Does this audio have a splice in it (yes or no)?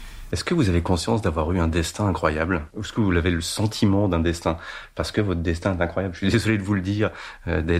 yes